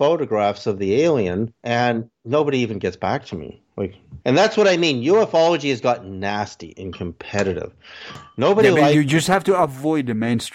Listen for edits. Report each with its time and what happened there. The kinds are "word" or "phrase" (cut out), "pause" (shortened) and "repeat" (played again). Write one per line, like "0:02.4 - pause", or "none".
0:02.1 - pause
0:04.2 - pause